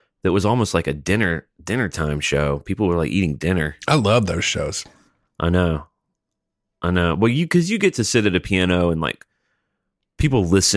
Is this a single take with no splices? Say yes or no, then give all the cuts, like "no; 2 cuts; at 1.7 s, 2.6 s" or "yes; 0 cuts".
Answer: yes; 0 cuts